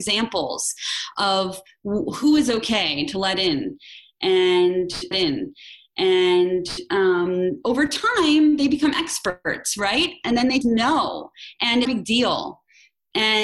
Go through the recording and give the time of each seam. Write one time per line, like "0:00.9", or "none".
0:05.1
0:10.6
0:11.9